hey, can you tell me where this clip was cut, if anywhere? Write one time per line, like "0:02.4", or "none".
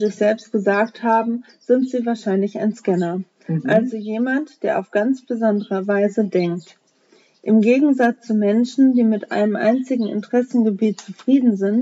none